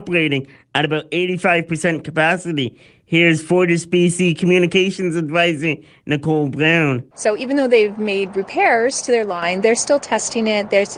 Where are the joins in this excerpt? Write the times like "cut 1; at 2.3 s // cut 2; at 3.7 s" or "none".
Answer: none